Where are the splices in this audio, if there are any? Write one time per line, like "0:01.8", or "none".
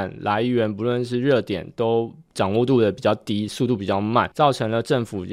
0:04.3